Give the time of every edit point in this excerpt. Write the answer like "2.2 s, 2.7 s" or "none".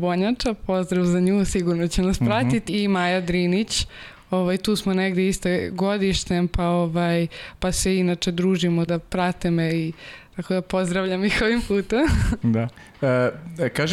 2.7 s, 8.9 s